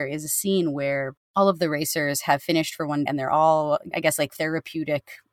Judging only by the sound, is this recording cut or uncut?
cut